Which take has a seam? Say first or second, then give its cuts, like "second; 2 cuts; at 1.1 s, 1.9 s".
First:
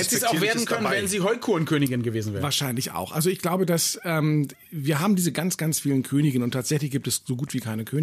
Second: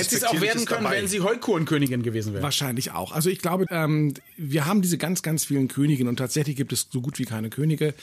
second; 1 cut; at 3.7 s